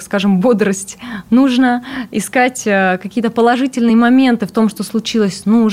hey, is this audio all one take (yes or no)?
yes